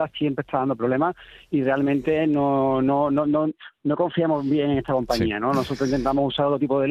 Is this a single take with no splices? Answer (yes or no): yes